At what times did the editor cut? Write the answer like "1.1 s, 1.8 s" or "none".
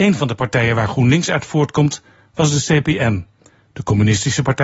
none